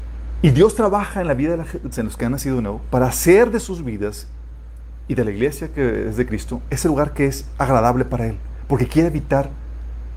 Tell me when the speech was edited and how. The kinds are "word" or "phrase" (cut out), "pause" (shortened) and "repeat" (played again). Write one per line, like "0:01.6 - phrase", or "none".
0:01.9 - word